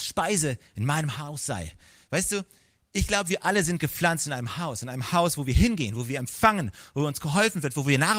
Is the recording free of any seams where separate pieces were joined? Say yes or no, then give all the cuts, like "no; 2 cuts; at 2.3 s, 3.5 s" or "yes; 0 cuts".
yes; 0 cuts